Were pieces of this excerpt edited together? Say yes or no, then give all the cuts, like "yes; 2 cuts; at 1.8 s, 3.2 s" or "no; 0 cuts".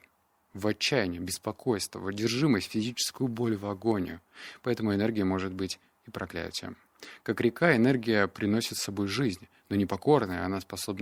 no; 0 cuts